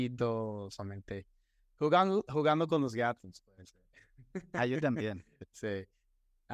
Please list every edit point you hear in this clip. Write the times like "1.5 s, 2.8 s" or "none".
none